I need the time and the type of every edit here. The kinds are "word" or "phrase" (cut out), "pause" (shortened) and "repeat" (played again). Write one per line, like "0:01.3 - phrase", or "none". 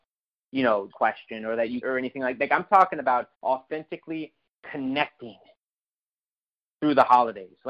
0:00.9 - phrase
0:01.8 - phrase
0:03.3 - pause